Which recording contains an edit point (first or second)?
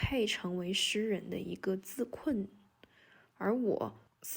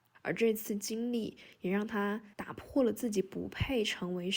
second